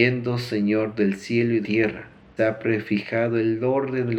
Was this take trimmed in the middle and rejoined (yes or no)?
yes